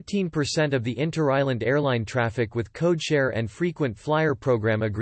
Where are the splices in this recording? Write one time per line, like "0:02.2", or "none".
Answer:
none